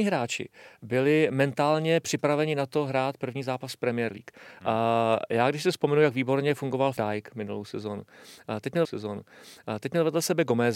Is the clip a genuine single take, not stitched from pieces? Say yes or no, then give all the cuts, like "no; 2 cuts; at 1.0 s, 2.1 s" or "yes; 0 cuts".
no; 2 cuts; at 7.0 s, 8.8 s